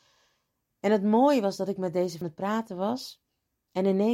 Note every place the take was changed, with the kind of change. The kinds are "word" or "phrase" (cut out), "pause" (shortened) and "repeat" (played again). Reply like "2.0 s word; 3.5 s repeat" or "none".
2.2 s phrase